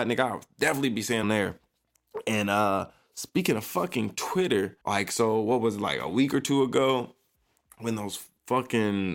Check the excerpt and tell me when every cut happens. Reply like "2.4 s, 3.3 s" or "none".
1.2 s, 4.8 s